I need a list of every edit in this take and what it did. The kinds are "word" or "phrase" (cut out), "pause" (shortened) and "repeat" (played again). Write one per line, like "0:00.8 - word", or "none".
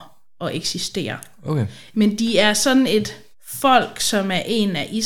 0:03.3 - pause